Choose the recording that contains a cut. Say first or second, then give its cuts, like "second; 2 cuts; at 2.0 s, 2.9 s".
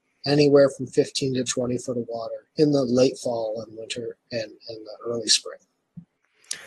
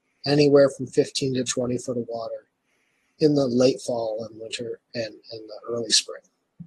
first; 1 cut; at 2.5 s